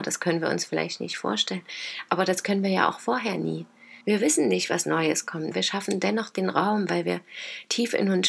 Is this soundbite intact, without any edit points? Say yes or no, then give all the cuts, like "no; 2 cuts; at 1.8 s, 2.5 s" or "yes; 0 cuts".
no; 2 cuts; at 4.0 s, 5.5 s